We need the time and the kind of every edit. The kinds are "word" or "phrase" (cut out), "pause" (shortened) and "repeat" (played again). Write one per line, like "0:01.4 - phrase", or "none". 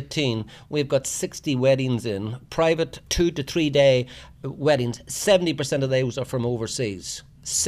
0:03.1 - word